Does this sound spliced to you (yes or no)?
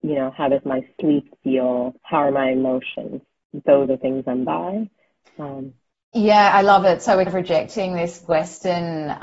yes